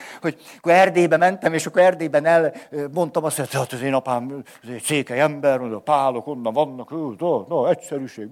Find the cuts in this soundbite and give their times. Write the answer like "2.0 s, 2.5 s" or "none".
none

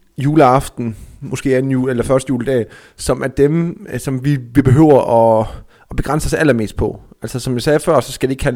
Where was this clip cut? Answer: none

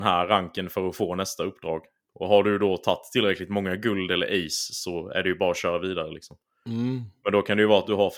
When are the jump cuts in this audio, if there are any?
none

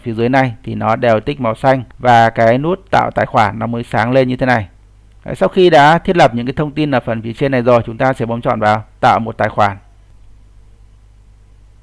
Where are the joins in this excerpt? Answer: 1.9 s

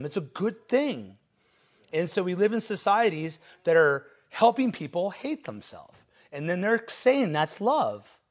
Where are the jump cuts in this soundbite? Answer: none

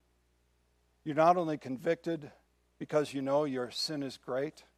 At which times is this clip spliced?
2.4 s

